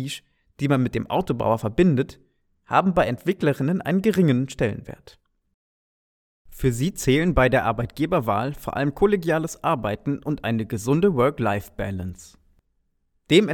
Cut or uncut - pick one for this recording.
uncut